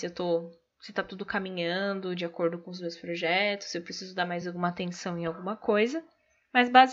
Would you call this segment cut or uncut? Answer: uncut